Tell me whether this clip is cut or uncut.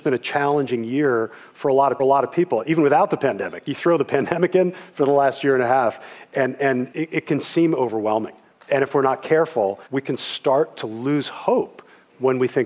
cut